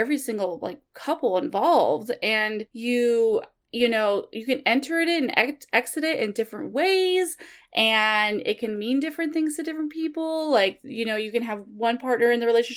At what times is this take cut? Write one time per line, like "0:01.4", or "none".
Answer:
none